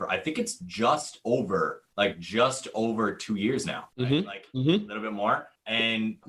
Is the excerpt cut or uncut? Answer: uncut